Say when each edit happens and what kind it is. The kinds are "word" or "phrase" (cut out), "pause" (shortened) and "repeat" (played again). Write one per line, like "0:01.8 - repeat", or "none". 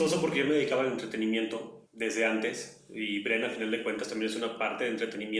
0:01.9 - pause